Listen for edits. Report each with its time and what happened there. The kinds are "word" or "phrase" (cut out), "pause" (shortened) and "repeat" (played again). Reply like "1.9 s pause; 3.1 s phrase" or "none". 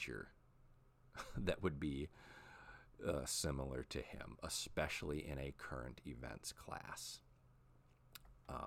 none